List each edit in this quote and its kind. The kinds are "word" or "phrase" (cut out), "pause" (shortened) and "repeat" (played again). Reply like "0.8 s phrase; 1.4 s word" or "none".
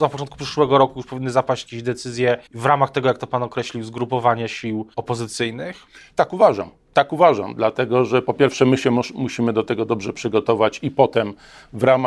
2.5 s pause; 4.9 s pause